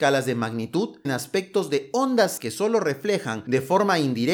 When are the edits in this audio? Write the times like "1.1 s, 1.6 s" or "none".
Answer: 1.0 s, 2.4 s

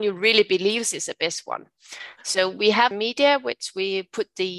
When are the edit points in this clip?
2.9 s

